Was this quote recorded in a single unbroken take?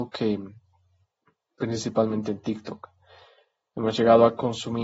yes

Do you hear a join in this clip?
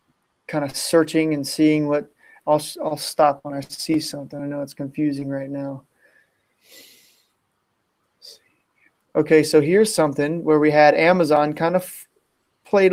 no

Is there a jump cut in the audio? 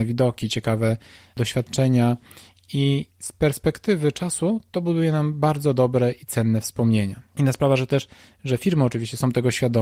no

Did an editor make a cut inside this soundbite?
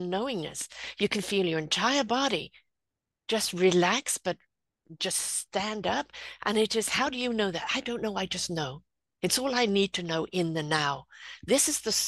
no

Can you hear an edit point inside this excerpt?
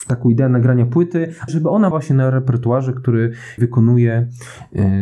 yes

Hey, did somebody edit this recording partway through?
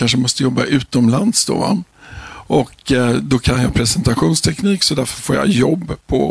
no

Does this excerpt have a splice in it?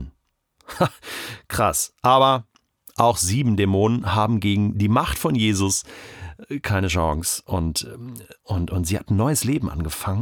no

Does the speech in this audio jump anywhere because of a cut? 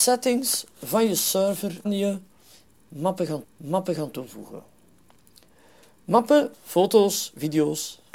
yes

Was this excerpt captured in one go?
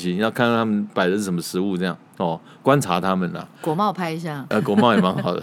no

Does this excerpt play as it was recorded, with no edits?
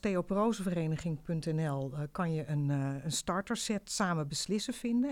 yes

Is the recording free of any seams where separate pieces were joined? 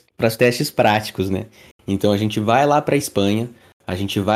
yes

